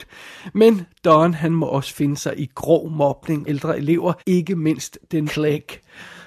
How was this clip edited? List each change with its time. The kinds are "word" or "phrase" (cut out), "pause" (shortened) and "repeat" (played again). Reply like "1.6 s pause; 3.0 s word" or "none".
3.5 s phrase; 4.2 s pause; 5.3 s word

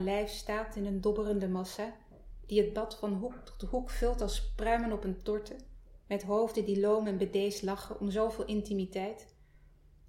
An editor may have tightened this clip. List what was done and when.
none

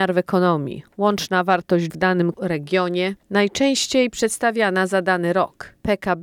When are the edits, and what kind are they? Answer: 1.9 s phrase; 2.3 s word

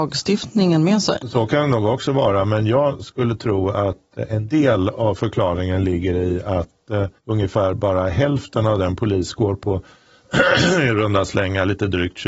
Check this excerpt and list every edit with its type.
7.2 s pause

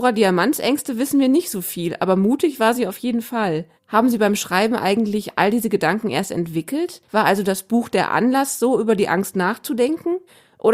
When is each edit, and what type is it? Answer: 3.8 s pause; 7.0 s pause

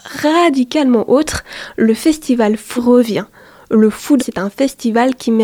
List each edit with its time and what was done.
2.8 s word; 4.2 s word

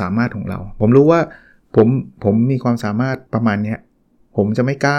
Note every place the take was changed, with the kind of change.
3.2 s pause

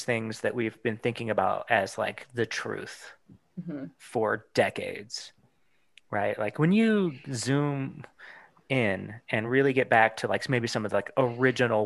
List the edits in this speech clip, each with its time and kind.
none

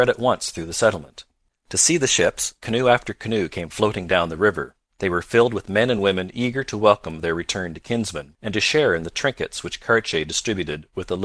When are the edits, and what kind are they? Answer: none

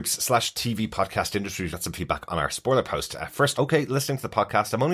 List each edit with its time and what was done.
1.7 s word; 3.5 s phrase

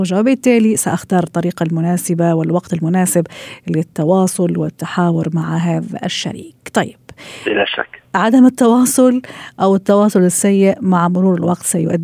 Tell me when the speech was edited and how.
none

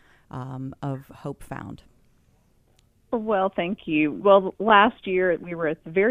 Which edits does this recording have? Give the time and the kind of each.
none

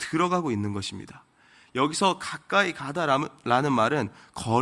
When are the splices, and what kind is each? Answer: none

